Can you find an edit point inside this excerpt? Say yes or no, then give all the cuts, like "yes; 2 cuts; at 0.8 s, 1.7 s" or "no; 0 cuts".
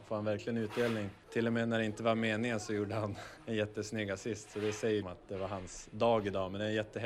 yes; 1 cut; at 5.0 s